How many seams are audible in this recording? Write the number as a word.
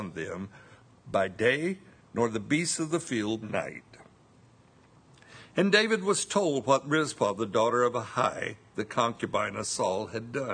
one